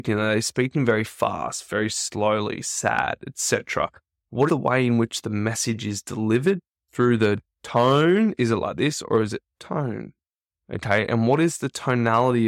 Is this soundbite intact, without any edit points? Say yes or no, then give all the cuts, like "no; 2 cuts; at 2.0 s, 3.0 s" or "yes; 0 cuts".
no; 1 cut; at 4.5 s